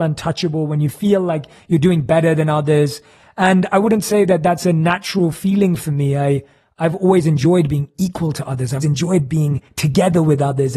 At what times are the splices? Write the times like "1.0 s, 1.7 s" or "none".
8.8 s

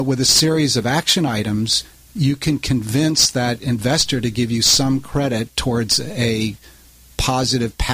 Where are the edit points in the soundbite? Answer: none

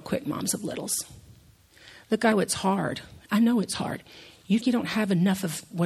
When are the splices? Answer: 2.3 s, 4.6 s

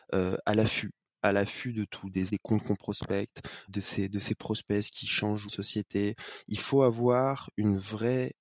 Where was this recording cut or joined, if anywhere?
2.3 s, 3.7 s, 5.5 s

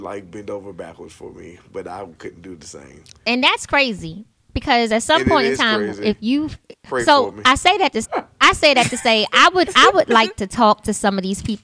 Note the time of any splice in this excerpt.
6.9 s, 8.0 s

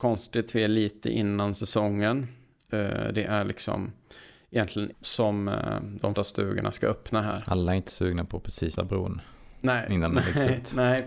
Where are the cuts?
4.9 s, 6.2 s, 8.8 s

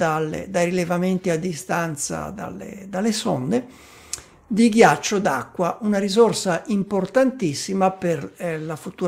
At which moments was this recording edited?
none

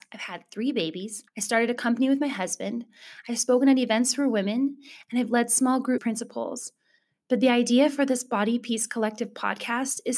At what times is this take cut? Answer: 1.3 s, 6.0 s

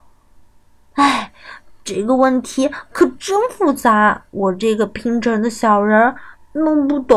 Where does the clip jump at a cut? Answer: 1.8 s, 4.3 s

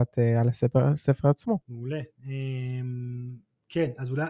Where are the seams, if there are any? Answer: 1.6 s

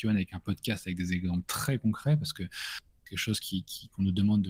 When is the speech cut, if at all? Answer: none

